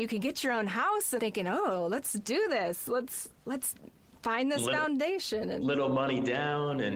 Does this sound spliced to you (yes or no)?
yes